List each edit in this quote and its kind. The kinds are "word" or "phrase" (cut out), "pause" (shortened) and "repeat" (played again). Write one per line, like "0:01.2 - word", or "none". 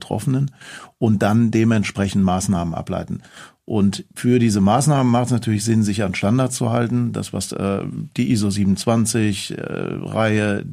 0:07.5 - phrase